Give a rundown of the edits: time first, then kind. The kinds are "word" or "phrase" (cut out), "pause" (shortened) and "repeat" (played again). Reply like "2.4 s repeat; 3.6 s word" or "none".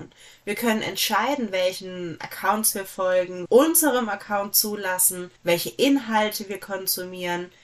3.5 s phrase; 5.4 s pause